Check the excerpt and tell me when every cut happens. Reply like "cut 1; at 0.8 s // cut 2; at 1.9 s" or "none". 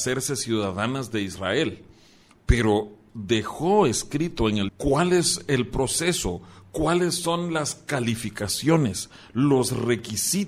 cut 1; at 3.1 s // cut 2; at 4.7 s